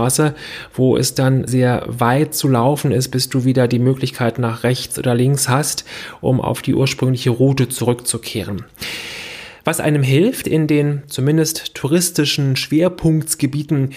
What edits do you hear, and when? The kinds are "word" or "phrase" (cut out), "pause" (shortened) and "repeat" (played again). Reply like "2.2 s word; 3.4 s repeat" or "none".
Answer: 1.5 s word; 10.4 s word